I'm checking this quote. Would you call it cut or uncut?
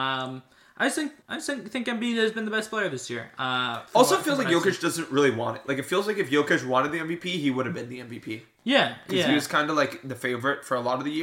cut